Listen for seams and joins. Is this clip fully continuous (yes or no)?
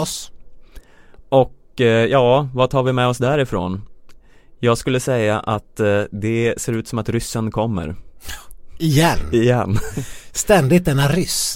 yes